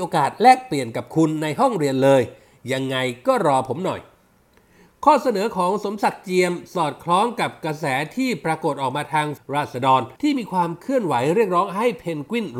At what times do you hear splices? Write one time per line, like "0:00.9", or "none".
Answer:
0:09.4
0:10.2

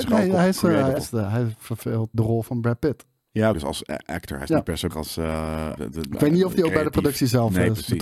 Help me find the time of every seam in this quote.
0:01.0
0:02.1
0:03.5
0:04.9
0:05.8

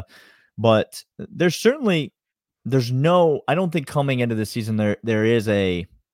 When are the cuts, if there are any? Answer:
0:01.1

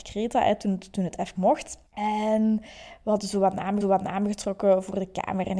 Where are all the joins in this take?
0:01.3
0:01.9
0:03.8

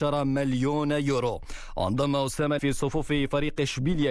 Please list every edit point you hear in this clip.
0:02.6

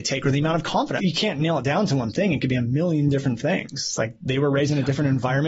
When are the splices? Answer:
0:01.0

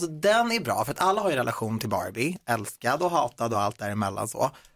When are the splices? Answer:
none

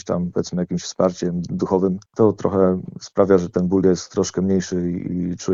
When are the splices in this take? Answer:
0:02.1

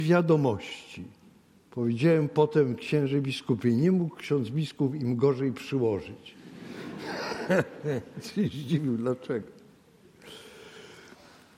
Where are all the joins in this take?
0:01.5

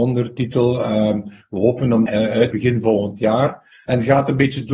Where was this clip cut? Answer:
0:02.1
0:02.5

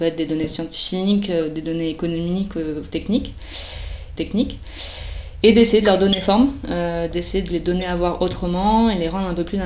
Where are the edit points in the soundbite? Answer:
0:04.2

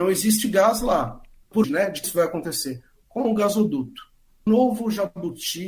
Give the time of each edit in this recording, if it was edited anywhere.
0:01.6
0:02.0
0:04.5

